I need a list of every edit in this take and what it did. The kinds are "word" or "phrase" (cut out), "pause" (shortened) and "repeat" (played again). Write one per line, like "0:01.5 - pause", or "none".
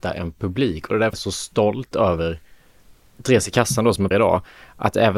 0:01.1 - word
0:04.1 - word